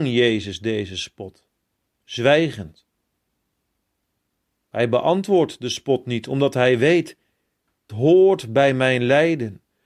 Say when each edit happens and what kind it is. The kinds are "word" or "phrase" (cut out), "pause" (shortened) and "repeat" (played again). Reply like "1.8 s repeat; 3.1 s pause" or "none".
1.7 s pause; 7.9 s word